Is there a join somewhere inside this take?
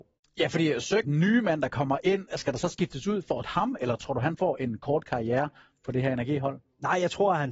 yes; 2 cuts; at 1.0 s, 3.4 s

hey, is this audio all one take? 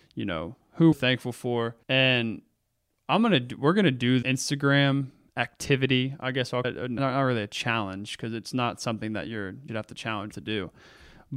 no; 8 cuts; at 0.9 s, 1.8 s, 4.2 s, 5.3 s, 6.6 s, 7.0 s, 9.7 s, 10.3 s

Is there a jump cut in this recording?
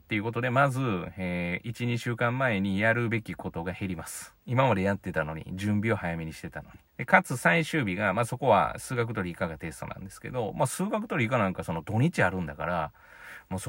yes; 2 cuts; at 4.4 s, 6.9 s

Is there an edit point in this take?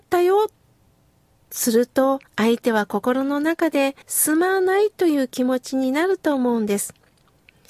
yes; 2 cuts; at 2.3 s, 4.0 s

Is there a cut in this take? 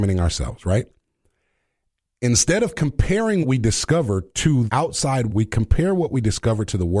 yes; 3 cuts; at 3.4 s, 4.7 s, 5.3 s

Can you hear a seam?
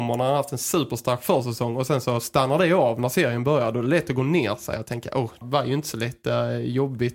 yes; 1 cut; at 5.4 s

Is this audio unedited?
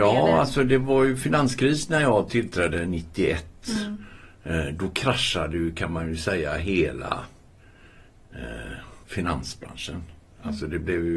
no; 1 cut; at 9.0 s

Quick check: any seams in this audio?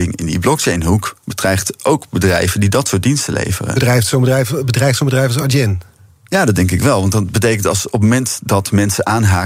no; 0 cuts

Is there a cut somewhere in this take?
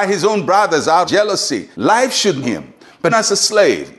yes; 4 cuts; at 1.0 s, 1.7 s, 2.4 s, 3.1 s

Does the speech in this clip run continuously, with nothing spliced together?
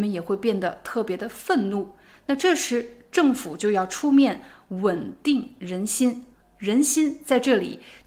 yes; 0 cuts

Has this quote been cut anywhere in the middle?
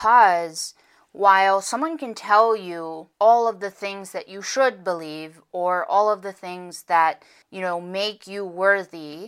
yes; 2 cuts; at 3.1 s, 7.4 s

